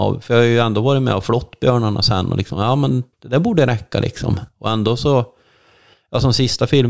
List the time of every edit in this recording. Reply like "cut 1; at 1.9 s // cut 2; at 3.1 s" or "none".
cut 1; at 3.1 s